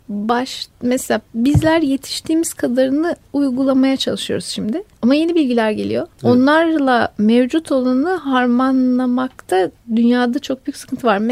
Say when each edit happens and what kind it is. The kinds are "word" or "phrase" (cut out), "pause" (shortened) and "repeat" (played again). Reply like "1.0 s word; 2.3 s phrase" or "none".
4.9 s pause; 6.1 s pause